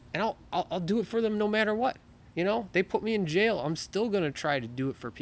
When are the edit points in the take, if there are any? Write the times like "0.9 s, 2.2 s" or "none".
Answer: 2.3 s